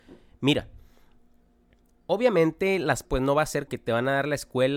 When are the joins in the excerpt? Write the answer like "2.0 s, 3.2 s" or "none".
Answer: 3.0 s, 3.7 s